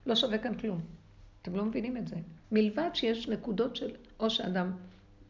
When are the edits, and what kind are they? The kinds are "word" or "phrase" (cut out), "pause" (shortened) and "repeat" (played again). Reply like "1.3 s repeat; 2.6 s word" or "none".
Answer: 2.4 s pause